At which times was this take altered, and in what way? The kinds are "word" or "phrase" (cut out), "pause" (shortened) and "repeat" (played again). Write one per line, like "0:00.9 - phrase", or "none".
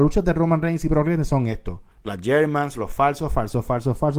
0:01.9 - pause